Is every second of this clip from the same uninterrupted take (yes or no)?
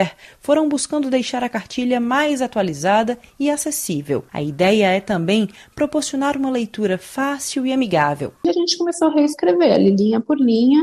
no